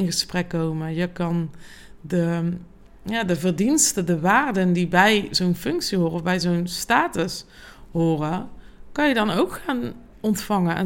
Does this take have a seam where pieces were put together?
no; 0 cuts

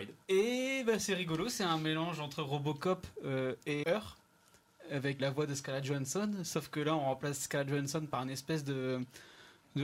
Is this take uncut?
no; 2 cuts; at 3.8 s, 5.2 s

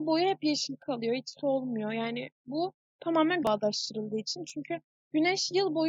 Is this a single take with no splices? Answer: no; 1 cut; at 3.4 s

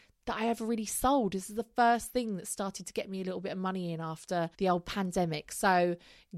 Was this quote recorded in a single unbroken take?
no; 1 cut; at 4.5 s

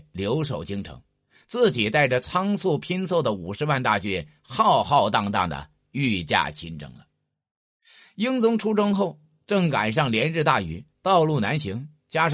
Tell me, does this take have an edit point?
no; 0 cuts

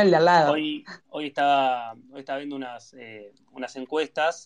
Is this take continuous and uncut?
no; 1 cut; at 1.0 s

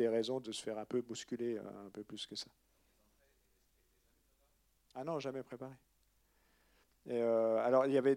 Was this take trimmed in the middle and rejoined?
no; 0 cuts

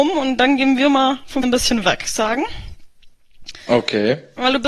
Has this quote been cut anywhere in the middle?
yes; 2 cuts; at 1.4 s, 2.0 s

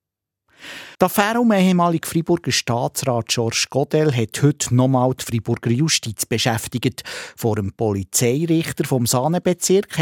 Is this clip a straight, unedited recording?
no; 1 cut; at 0.9 s

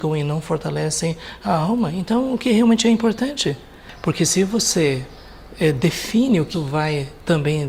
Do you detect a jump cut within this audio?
yes; 1 cut; at 6.5 s

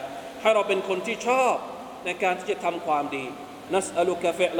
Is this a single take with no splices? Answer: no; 1 cut; at 3.7 s

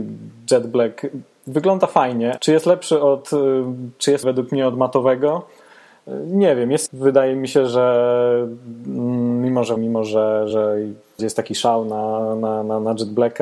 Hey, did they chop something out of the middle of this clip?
yes; 6 cuts; at 2.4 s, 4.2 s, 6.9 s, 9.8 s, 10.5 s, 11.2 s

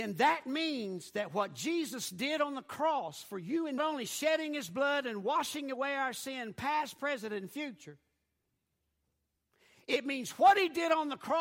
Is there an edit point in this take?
yes; 1 cut; at 3.8 s

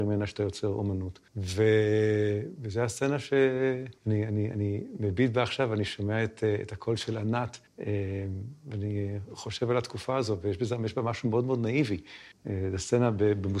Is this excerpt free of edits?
no; 4 cuts; at 1.3 s, 4.0 s, 7.7 s, 12.3 s

